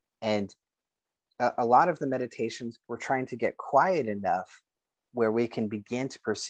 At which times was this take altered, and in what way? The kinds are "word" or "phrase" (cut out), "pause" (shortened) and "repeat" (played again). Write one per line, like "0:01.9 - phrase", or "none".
0:02.8 - pause